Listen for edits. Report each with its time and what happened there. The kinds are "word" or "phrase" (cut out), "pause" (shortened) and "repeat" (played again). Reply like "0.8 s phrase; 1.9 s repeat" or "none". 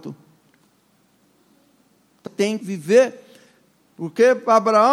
2.3 s word; 2.6 s word